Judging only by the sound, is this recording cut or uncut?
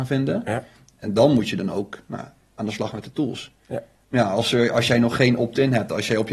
uncut